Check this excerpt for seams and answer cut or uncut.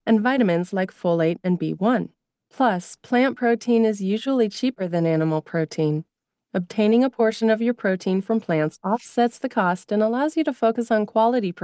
uncut